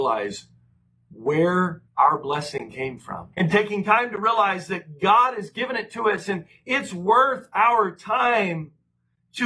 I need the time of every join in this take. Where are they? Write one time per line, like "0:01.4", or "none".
0:01.9
0:03.3